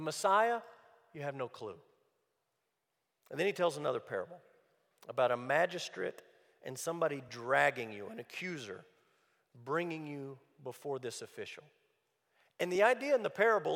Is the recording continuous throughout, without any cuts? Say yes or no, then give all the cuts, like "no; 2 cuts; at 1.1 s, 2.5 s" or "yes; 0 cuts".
yes; 0 cuts